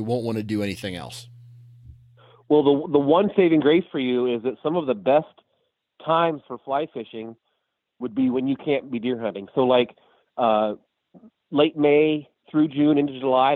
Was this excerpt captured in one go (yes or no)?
yes